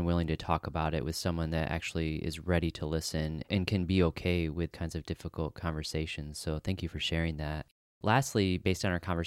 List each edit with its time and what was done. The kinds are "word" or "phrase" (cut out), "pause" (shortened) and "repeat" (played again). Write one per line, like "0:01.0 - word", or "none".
0:04.7 - word